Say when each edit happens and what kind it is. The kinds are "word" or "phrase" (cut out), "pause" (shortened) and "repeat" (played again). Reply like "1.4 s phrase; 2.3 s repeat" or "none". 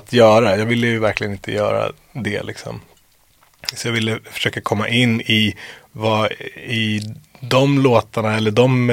none